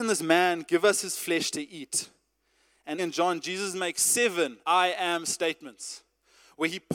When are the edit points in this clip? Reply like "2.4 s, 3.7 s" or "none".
3.0 s, 4.6 s